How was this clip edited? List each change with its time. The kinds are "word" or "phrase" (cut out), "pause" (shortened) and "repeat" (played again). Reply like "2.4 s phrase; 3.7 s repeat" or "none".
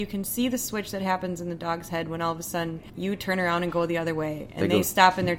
2.9 s pause